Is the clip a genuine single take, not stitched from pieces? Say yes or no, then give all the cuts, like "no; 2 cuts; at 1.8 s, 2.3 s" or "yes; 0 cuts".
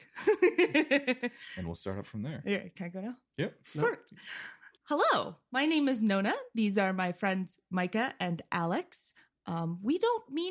no; 1 cut; at 4.8 s